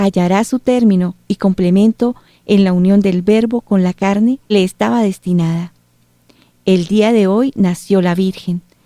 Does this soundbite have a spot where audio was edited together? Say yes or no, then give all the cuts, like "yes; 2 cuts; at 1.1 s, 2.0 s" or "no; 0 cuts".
yes; 1 cut; at 4.5 s